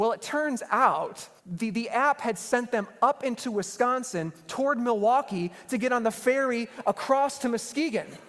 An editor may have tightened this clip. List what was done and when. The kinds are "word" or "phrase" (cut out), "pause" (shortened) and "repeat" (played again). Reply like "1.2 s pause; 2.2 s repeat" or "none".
1.4 s pause